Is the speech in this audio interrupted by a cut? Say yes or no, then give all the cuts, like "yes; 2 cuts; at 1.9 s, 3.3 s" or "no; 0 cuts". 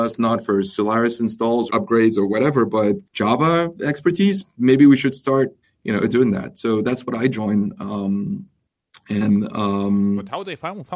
yes; 4 cuts; at 1.7 s, 3.0 s, 5.6 s, 6.1 s